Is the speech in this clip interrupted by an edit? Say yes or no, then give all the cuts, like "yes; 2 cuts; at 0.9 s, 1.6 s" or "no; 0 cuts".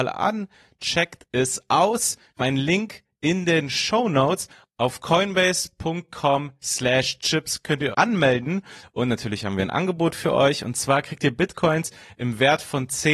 yes; 2 cuts; at 2.4 s, 7.9 s